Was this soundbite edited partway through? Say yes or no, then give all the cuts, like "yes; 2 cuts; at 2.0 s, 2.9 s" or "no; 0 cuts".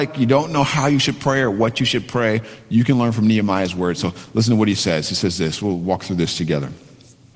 no; 0 cuts